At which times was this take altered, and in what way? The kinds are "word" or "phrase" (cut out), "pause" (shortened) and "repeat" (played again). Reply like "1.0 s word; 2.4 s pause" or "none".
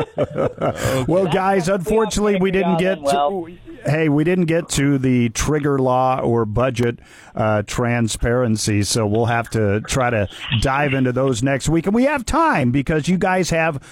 none